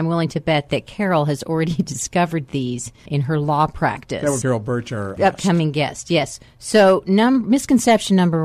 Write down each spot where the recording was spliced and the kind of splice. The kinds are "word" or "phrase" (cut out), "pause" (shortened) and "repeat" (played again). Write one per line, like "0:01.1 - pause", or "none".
0:03.1 - word
0:04.4 - word
0:05.2 - word

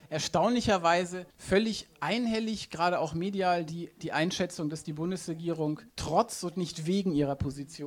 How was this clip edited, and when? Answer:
0:01.3 - pause
0:05.9 - pause

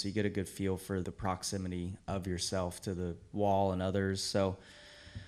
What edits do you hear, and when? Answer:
0:01.0 - word

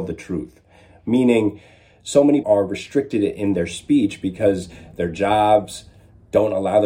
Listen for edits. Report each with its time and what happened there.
0:02.4 - word

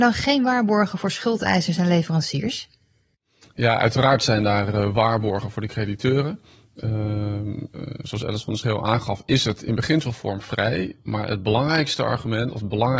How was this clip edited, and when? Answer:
none

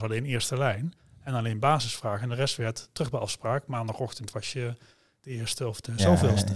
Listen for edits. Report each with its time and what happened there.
none

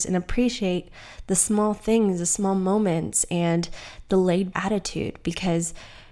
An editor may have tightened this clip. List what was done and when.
0:04.5 - word

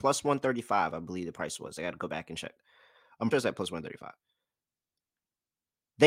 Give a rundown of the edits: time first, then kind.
0:03.3 - phrase

